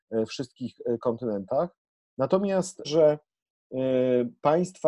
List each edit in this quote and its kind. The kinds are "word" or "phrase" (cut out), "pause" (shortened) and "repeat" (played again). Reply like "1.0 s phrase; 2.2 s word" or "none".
2.8 s word